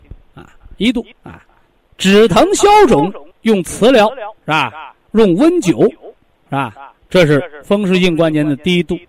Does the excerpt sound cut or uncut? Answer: cut